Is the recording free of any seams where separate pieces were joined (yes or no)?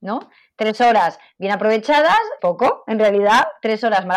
no